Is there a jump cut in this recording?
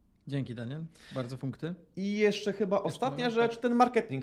yes; 1 cut; at 1.4 s

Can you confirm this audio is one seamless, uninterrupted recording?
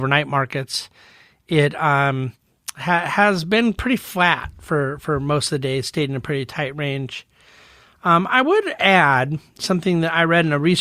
yes; 0 cuts

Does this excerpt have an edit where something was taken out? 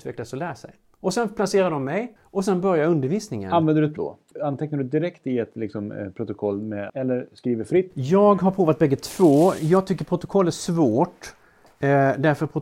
yes; 3 cuts; at 2.2 s, 4.0 s, 6.9 s

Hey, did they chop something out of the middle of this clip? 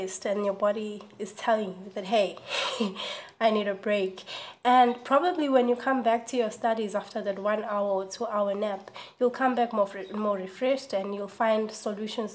no; 0 cuts

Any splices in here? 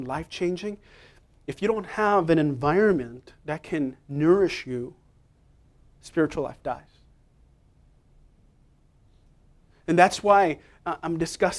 no; 0 cuts

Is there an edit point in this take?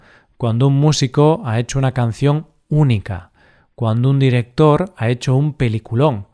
no; 0 cuts

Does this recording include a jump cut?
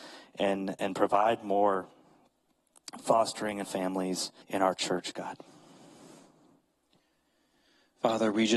yes; 2 cuts; at 3.6 s, 4.4 s

